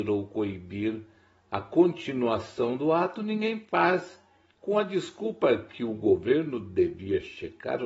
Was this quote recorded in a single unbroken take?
yes; 0 cuts

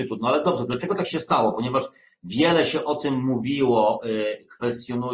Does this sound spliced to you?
no; 0 cuts

